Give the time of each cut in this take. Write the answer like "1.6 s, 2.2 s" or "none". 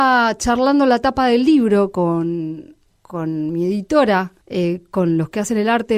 4.4 s